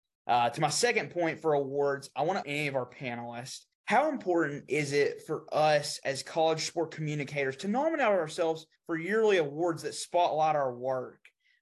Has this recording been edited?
yes; 3 cuts; at 2.4 s, 3.7 s, 8.8 s

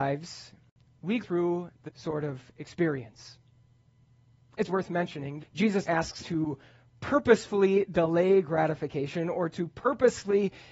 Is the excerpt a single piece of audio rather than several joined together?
no; 6 cuts; at 1.2 s, 1.9 s, 4.7 s, 5.4 s, 5.9 s, 6.2 s

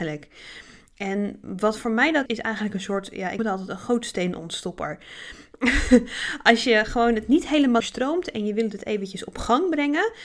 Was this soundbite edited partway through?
yes; 3 cuts; at 2.3 s, 3.4 s, 7.8 s

